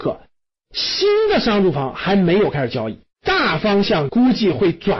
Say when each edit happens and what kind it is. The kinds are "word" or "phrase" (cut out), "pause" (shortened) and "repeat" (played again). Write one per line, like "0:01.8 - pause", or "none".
0:03.1 - pause